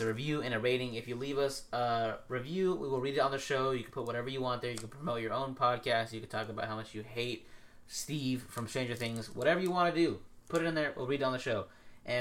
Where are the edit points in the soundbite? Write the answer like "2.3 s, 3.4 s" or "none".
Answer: none

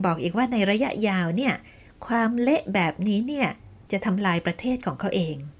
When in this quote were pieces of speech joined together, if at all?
none

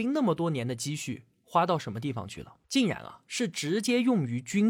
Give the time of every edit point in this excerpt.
2.6 s

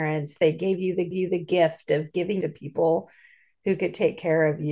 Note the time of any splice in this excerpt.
1.1 s, 2.4 s

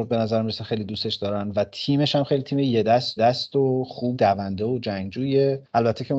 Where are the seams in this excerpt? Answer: 3.2 s, 4.1 s

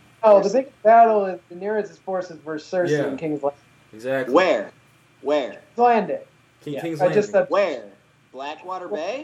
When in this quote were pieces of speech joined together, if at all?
none

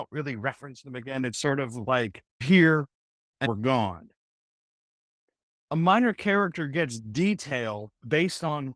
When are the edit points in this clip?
1.3 s, 2.4 s, 3.5 s

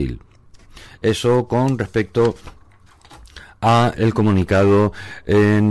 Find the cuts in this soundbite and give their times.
4.0 s

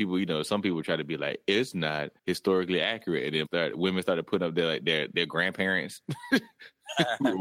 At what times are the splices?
2.2 s, 3.4 s, 5.1 s

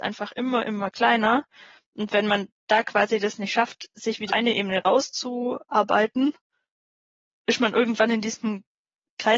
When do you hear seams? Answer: 4.3 s, 7.3 s

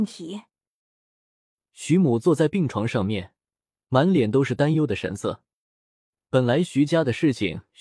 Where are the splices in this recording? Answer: none

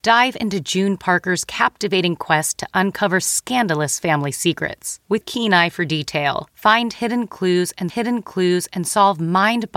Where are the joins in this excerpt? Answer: 5.2 s, 7.9 s

